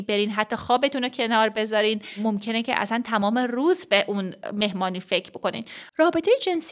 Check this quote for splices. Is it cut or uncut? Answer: uncut